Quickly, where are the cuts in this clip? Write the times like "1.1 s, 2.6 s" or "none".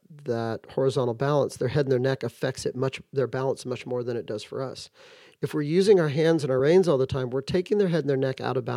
none